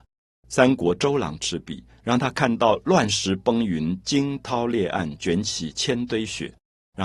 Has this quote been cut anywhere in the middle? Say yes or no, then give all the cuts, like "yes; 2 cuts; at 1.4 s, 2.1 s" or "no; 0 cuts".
no; 0 cuts